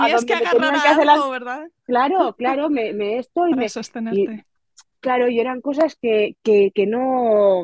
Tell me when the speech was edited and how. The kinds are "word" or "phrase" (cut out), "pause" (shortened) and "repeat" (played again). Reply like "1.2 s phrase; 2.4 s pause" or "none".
none

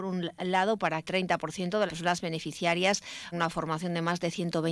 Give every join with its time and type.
1.1 s word; 1.9 s word; 3.3 s word

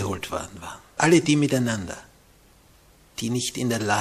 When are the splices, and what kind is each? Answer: 1.0 s word

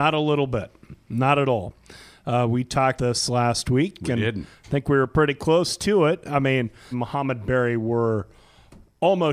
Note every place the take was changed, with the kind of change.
3.0 s word; 6.9 s phrase

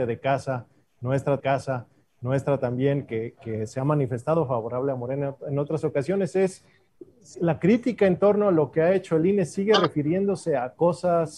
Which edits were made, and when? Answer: 1.4 s repeat

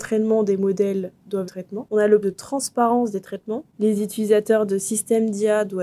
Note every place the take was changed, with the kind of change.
1.4 s phrase; 2.2 s word

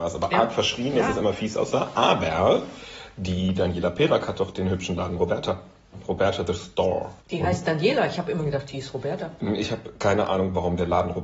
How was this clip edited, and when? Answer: 7.2 s pause

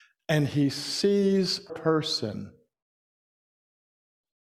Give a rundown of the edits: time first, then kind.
1.7 s word

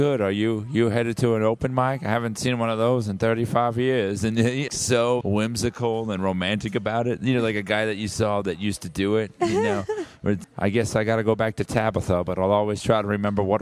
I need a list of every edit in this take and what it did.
4.7 s word; 5.2 s word; 10.4 s word

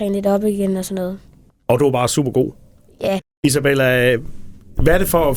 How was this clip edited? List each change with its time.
none

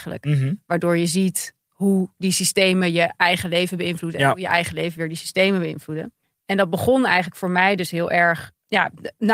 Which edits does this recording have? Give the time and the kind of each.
1.6 s pause; 6.2 s pause

